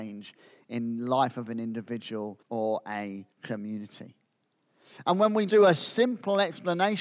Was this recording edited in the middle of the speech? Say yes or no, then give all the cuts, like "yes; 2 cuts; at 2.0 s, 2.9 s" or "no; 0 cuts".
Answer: yes; 3 cuts; at 2.4 s, 3.3 s, 5.5 s